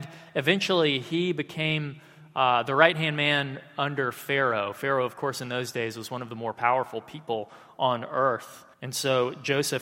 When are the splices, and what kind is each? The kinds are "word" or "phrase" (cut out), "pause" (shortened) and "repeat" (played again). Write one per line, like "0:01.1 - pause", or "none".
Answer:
0:08.7 - pause